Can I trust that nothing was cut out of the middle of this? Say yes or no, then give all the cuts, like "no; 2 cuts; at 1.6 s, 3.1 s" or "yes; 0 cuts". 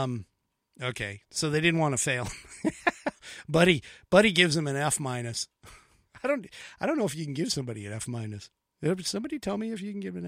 yes; 0 cuts